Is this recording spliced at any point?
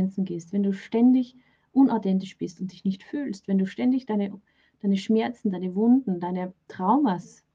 no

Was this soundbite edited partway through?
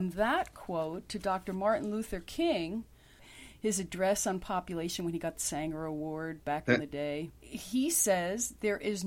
yes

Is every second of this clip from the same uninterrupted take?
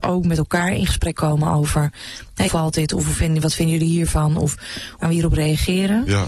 no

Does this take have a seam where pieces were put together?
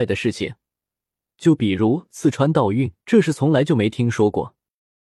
yes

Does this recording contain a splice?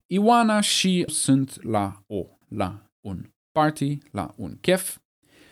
yes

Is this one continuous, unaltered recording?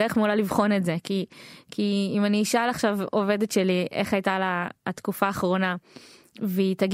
yes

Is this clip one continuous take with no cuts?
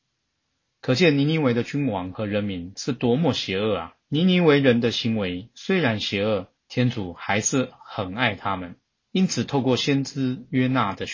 no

